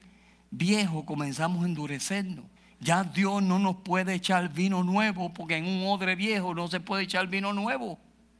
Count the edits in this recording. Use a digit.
1